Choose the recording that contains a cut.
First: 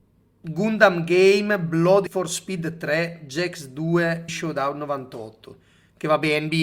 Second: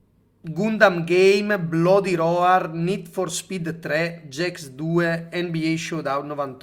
first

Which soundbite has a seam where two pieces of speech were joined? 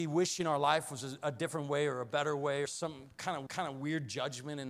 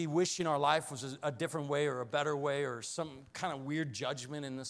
first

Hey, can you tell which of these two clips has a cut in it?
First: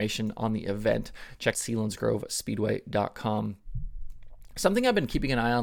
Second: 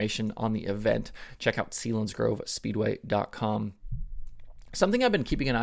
first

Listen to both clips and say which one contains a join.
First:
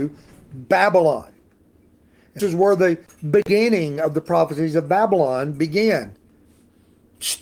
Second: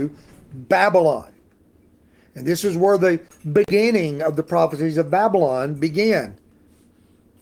first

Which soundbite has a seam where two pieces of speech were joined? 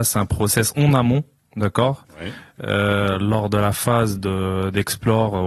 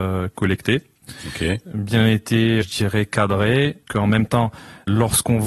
second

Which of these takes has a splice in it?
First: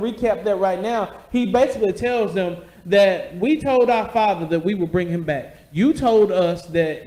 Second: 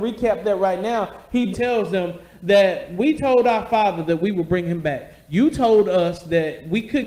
second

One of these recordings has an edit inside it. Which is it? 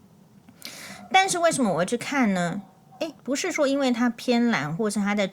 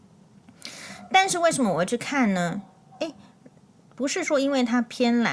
first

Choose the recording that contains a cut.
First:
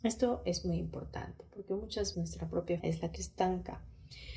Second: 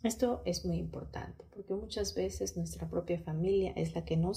first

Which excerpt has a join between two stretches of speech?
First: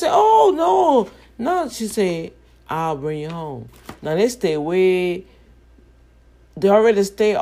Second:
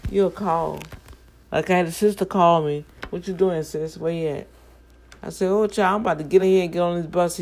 second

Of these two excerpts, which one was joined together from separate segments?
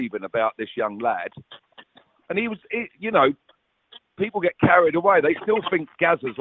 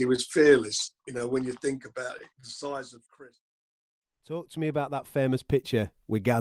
second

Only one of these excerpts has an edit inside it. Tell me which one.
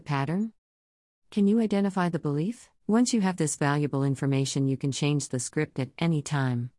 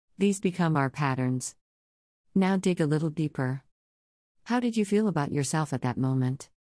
first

